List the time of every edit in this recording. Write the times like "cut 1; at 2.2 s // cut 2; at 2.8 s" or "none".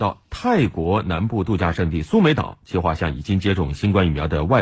none

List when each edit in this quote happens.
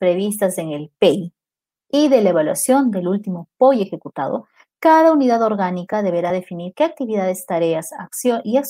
none

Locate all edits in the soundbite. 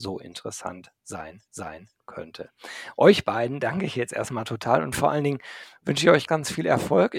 cut 1; at 1.5 s // cut 2; at 6.3 s

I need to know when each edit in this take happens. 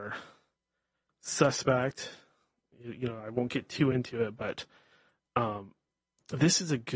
none

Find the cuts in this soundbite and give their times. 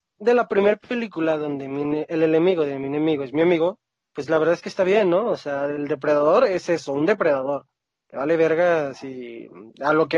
none

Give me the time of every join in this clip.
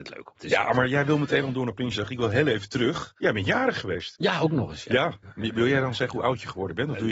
cut 1; at 3.2 s

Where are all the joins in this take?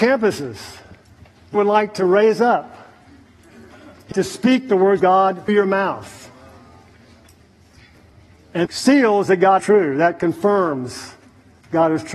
cut 1; at 1.5 s // cut 2; at 4.1 s // cut 3; at 5.0 s // cut 4; at 5.5 s // cut 5; at 8.7 s // cut 6; at 9.6 s

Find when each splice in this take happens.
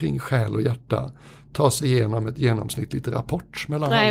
none

